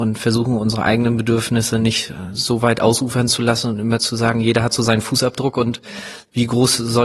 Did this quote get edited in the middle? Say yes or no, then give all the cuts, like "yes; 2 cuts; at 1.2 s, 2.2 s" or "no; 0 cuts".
no; 0 cuts